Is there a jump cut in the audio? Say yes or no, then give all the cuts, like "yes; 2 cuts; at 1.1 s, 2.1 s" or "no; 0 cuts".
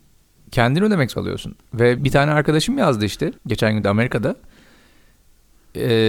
yes; 4 cuts; at 1.1 s, 2.0 s, 3.4 s, 3.8 s